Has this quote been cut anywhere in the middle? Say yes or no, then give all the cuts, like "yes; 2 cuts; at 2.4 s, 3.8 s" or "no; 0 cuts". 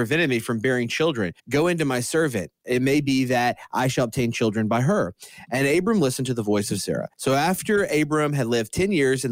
yes; 2 cuts; at 1.4 s, 7.1 s